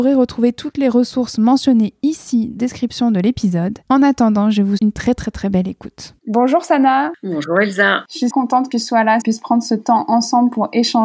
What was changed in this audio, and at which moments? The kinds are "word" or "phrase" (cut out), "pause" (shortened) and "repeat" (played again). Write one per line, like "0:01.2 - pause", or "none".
0:02.6 - phrase
0:03.8 - pause
0:04.8 - word
0:06.2 - pause
0:08.3 - word
0:08.7 - word
0:09.2 - phrase